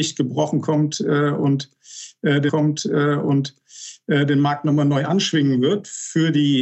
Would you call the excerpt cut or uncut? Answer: cut